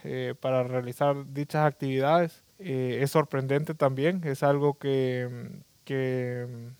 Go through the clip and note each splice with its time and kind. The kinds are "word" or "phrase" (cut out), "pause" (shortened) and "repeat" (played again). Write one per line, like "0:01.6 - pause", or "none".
0:02.5 - pause